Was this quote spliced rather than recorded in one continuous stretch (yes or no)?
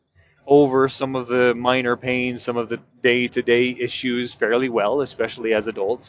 no